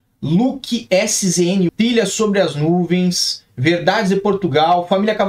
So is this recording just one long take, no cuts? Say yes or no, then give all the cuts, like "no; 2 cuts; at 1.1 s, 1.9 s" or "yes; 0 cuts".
no; 1 cut; at 1.7 s